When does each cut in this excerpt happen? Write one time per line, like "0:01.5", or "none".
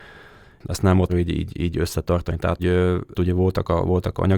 0:01.1
0:02.6
0:03.1

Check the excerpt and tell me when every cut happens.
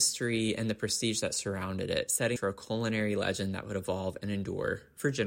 0:02.4

